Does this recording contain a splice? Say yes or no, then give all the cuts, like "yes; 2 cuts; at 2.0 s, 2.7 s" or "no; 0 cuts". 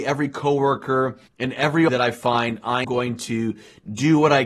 yes; 3 cuts; at 1.3 s, 1.9 s, 2.8 s